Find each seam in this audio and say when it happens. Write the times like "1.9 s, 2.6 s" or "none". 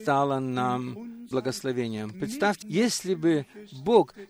1.3 s, 2.6 s